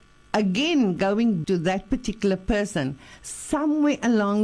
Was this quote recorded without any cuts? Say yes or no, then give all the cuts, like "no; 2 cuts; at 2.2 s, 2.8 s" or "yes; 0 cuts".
no; 1 cut; at 1.4 s